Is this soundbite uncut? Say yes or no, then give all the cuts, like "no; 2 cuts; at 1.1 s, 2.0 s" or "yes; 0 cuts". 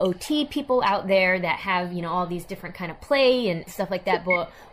yes; 0 cuts